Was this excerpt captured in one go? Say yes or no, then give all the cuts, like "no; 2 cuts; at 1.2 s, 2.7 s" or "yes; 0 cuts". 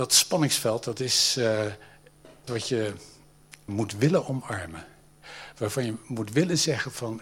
no; 2 cuts; at 2.5 s, 3.7 s